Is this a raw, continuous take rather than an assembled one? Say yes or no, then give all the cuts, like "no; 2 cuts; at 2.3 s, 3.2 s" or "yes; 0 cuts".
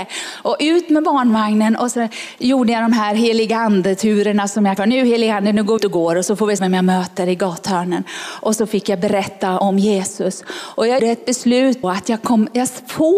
no; 6 cuts; at 4.8 s, 5.8 s, 6.6 s, 9.6 s, 11.0 s, 11.8 s